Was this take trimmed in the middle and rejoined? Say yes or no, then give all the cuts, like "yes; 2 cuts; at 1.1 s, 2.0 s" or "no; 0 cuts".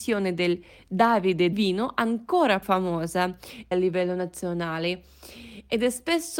yes; 3 cuts; at 1.5 s, 2.6 s, 3.7 s